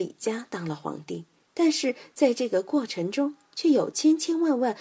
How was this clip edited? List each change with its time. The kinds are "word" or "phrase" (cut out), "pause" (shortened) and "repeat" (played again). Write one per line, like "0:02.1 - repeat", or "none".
none